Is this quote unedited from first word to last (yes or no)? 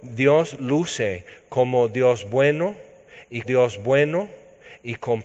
no